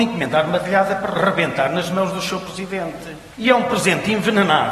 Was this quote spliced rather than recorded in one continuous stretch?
yes; 1 cut; at 3.3 s

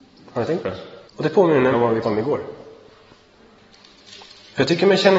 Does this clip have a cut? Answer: yes; 3 cuts; at 1.1 s, 1.7 s, 2.0 s

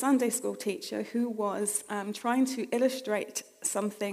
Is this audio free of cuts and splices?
yes; 0 cuts

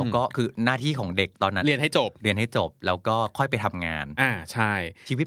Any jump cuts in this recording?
no; 0 cuts

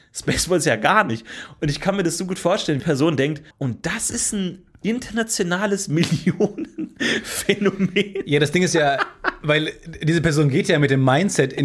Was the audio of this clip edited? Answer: yes; 2 cuts; at 2.8 s, 3.5 s

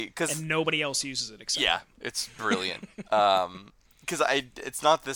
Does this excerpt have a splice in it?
no; 0 cuts

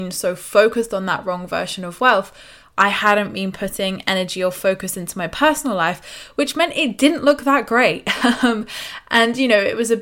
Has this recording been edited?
no; 0 cuts

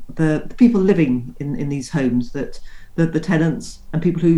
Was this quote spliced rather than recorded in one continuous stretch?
no; 0 cuts

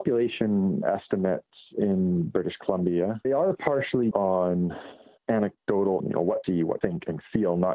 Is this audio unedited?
no; 6 cuts; at 1.8 s, 3.2 s, 4.1 s, 6.0 s, 6.4 s, 6.8 s

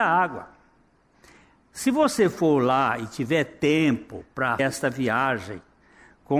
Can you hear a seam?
yes; 1 cut; at 4.6 s

